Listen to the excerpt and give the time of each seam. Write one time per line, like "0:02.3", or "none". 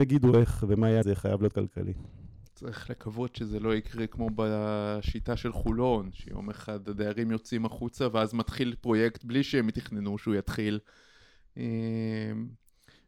0:01.0